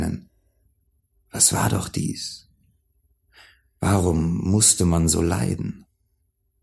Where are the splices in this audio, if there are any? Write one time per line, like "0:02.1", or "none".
none